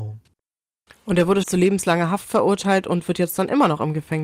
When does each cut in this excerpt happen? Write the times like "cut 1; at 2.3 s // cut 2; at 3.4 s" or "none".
cut 1; at 1.4 s